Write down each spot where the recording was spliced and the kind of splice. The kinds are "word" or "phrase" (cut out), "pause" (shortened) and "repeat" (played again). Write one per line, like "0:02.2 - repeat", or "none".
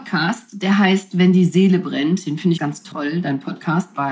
0:02.6 - word